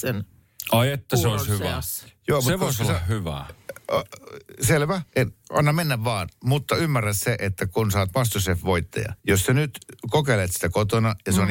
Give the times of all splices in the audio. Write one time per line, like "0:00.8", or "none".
0:05.1
0:09.2

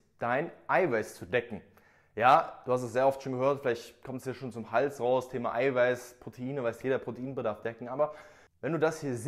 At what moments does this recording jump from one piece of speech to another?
none

